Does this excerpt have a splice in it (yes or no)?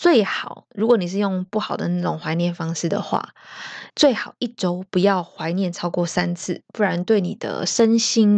yes